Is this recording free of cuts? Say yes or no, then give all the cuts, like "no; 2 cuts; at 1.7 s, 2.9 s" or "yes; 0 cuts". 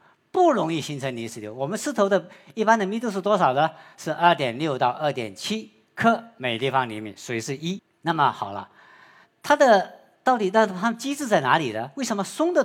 no; 1 cut; at 9.2 s